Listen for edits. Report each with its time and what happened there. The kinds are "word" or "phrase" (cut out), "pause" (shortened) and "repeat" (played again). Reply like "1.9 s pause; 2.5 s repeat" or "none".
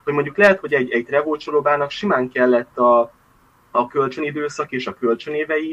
none